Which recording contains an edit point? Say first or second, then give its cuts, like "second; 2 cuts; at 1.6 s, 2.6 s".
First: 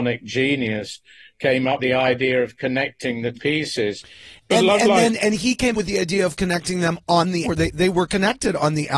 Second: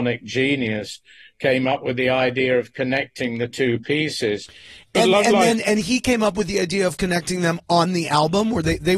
first; 4 cuts; at 1.8 s, 3.3 s, 5.7 s, 7.4 s